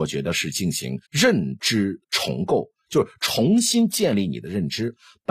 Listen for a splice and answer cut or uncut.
cut